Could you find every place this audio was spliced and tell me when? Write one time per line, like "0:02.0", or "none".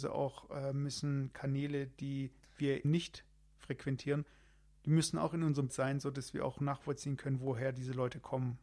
0:02.8
0:05.7